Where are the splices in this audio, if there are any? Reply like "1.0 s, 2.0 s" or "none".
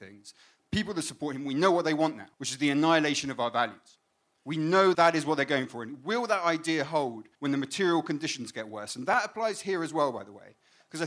2.3 s, 4.9 s, 7.3 s

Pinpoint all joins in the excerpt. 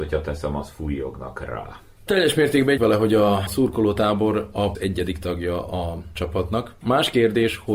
2.8 s, 4.7 s

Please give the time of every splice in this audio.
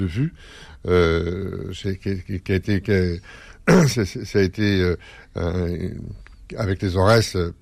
none

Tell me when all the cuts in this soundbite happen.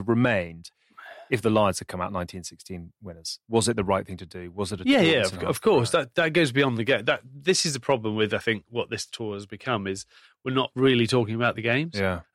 none

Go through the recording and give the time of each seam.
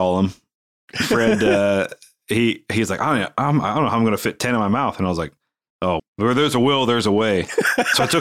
6.0 s

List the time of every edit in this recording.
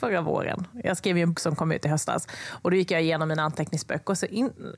1.3 s

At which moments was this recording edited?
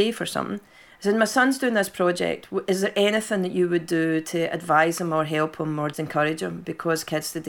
5.9 s

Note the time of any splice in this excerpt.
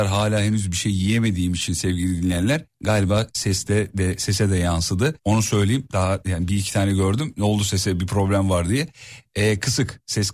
2.7 s, 5.2 s

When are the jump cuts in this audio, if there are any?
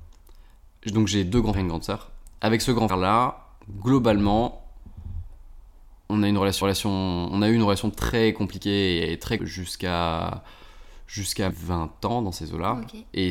1.5 s, 2.9 s, 3.6 s, 6.6 s, 9.4 s, 11.5 s

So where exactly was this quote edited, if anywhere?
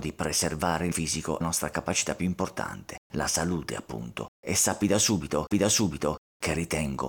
0.9 s, 1.4 s, 3.0 s, 4.3 s, 5.5 s

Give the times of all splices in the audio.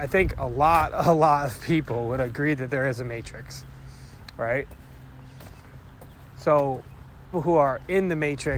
7.3 s

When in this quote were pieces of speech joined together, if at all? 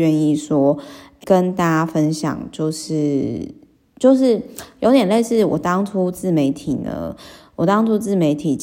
1.2 s

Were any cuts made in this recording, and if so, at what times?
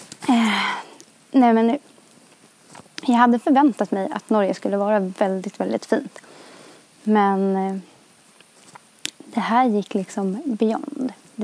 none

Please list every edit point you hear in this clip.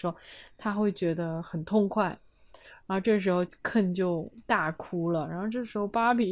none

